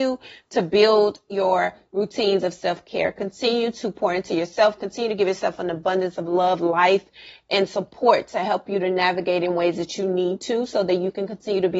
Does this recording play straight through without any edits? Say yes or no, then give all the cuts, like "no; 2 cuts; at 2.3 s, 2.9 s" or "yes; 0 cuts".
yes; 0 cuts